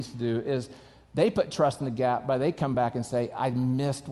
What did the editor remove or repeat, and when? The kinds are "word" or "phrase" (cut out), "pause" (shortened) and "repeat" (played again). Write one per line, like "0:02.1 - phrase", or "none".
none